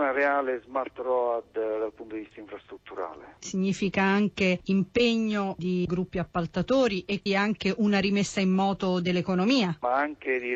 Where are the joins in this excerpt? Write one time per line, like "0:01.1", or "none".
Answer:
0:07.3